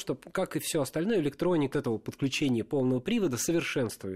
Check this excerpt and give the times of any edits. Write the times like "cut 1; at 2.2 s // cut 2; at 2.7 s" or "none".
cut 1; at 1.7 s

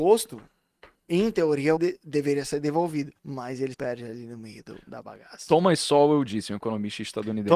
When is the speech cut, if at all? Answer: cut 1; at 1.8 s // cut 2; at 3.2 s // cut 3; at 3.7 s // cut 4; at 4.8 s

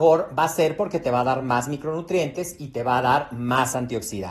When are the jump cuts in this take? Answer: none

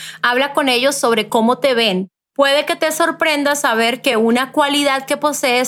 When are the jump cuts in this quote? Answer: none

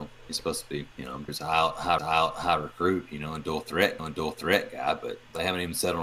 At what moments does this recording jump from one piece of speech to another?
cut 1; at 0.9 s // cut 2; at 1.3 s // cut 3; at 2.0 s // cut 4; at 4.0 s

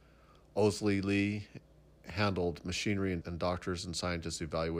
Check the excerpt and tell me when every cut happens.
cut 1; at 3.2 s

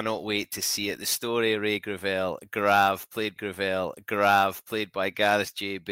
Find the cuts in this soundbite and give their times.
cut 1; at 3.4 s

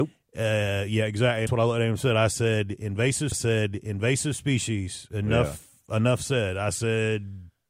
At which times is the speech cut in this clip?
cut 1; at 1.5 s // cut 2; at 3.3 s

